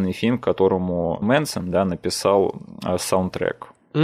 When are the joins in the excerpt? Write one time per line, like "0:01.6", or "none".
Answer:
0:01.2